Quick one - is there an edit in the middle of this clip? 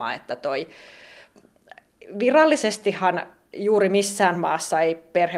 no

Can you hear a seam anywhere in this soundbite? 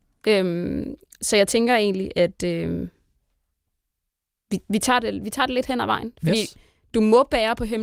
no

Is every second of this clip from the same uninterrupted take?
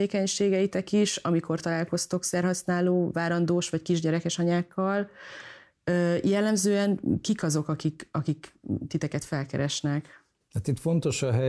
yes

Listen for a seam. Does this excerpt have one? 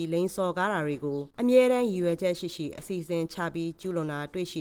yes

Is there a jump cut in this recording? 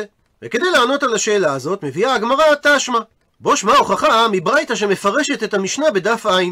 no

